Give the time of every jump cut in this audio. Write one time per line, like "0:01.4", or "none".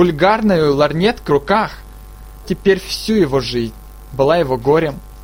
0:01.3
0:02.4